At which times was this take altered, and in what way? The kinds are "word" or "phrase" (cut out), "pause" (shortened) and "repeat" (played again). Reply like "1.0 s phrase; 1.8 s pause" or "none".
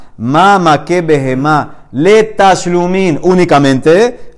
none